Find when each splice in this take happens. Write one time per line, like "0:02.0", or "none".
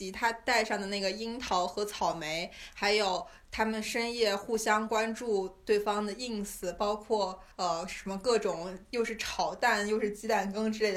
0:07.5